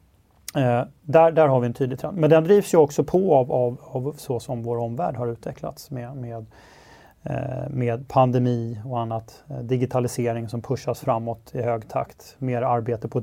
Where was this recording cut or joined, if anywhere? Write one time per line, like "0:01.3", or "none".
none

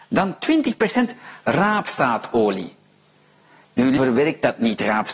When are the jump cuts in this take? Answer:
0:04.0

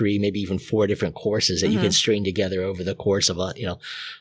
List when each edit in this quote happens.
none

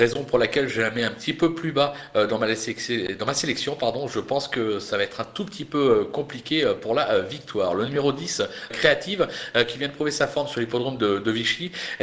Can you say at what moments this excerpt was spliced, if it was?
0:08.7

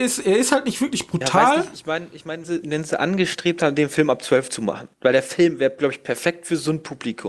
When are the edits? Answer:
0:02.4
0:04.9

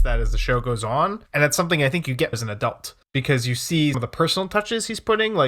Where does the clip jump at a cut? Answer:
0:01.3
0:02.3
0:03.0
0:03.9

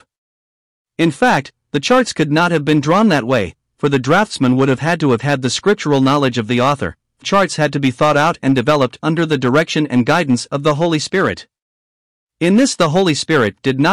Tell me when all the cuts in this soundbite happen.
0:07.2

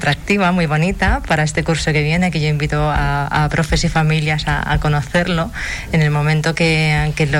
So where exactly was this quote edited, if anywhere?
none

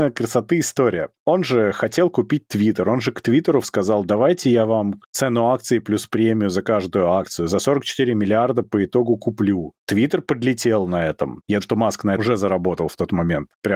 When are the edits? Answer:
0:03.6
0:05.0
0:11.6
0:12.2

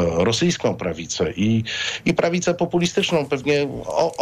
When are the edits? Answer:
none

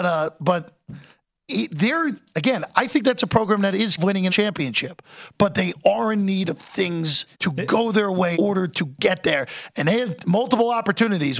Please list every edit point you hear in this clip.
0:04.0
0:04.3
0:07.3
0:08.3

